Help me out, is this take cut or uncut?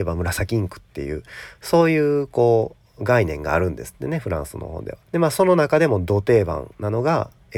cut